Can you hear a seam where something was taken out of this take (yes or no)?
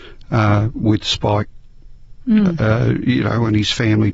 no